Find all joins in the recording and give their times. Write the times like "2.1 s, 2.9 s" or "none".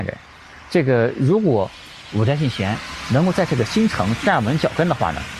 none